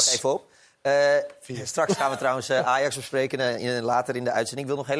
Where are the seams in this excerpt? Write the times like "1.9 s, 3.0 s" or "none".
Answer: none